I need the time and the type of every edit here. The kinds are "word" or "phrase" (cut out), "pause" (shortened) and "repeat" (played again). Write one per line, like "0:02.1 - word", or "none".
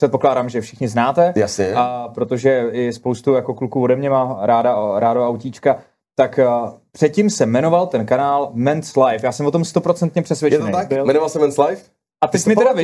none